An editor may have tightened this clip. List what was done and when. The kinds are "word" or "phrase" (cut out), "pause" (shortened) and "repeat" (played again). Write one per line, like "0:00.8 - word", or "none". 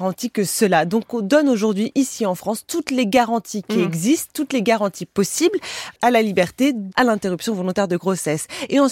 0:06.0 - word
0:06.9 - word